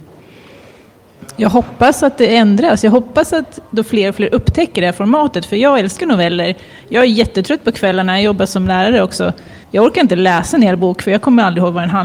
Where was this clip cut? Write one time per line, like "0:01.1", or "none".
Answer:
0:09.6